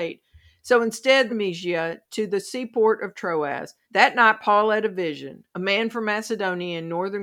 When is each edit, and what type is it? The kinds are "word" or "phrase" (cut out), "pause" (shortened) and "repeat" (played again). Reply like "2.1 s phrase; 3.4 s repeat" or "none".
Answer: 1.3 s phrase; 3.8 s pause